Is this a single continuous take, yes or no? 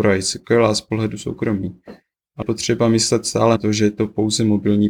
no